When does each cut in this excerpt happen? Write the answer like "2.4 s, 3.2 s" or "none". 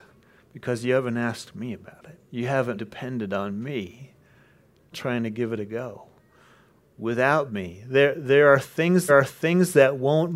2.8 s, 4.9 s, 9.1 s